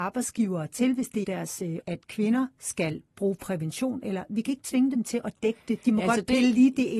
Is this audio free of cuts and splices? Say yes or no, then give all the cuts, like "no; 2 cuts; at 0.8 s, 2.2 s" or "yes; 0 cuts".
no; 2 cuts; at 1.2 s, 1.8 s